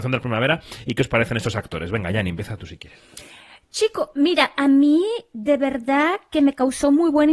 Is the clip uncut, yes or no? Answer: yes